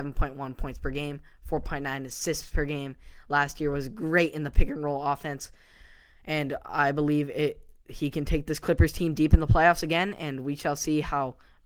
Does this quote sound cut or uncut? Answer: uncut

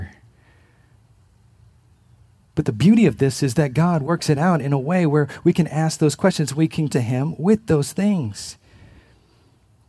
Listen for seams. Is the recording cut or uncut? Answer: cut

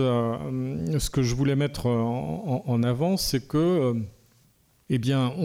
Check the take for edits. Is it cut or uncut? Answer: uncut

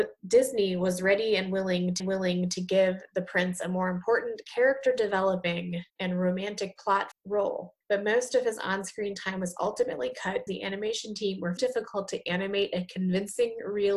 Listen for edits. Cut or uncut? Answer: cut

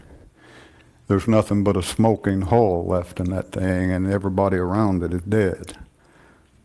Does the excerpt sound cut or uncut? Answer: uncut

